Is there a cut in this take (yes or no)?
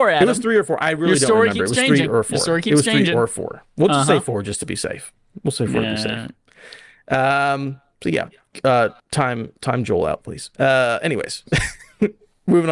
yes